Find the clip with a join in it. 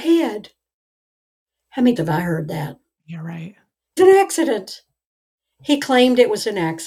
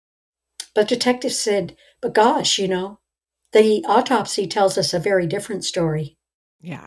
first; 2 cuts; at 2.0 s, 4.0 s

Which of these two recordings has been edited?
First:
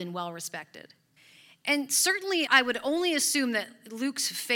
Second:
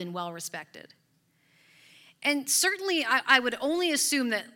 first; 2 cuts; at 1.2 s, 2.5 s

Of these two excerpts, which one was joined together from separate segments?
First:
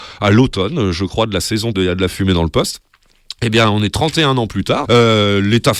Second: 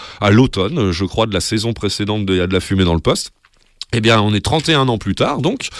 first; 2 cuts; at 1.7 s, 4.8 s

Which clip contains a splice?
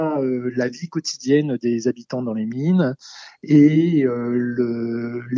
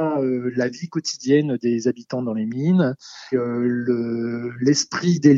second; 1 cut; at 3.3 s

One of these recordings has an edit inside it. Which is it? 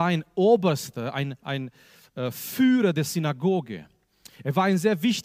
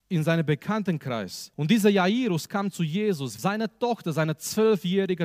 second; 2 cuts; at 1.5 s, 3.4 s

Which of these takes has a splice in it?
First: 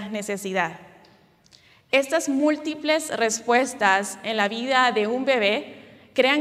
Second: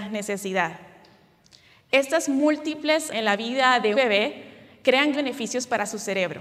second; 3 cuts; at 3.1 s, 3.9 s, 5.1 s

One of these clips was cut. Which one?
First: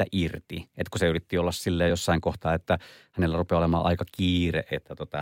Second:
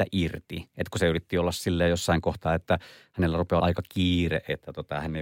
second; 1 cut; at 3.6 s

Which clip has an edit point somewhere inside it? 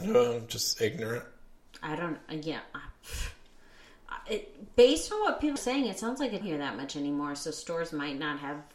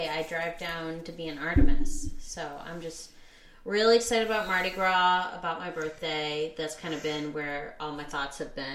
first; 2 cuts; at 5.6 s, 6.4 s

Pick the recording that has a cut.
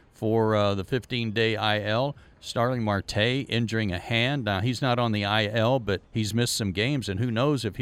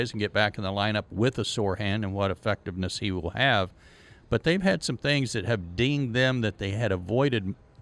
first; 1 cut; at 6.0 s

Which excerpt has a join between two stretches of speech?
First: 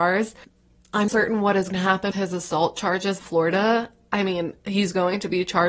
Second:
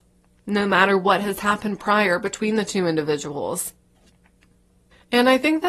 first; 4 cuts; at 1.1 s, 1.7 s, 2.1 s, 3.2 s

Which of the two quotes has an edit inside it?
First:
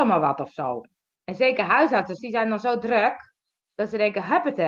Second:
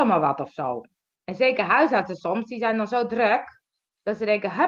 first; 1 cut; at 2.2 s

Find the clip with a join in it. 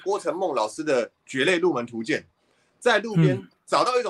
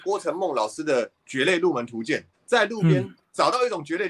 second; 1 cut; at 2.3 s

